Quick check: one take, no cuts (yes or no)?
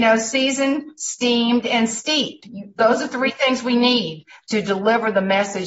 yes